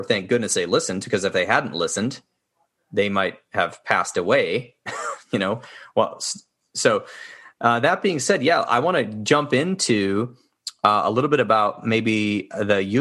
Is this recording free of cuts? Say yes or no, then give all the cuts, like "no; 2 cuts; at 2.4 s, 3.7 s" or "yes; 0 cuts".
yes; 0 cuts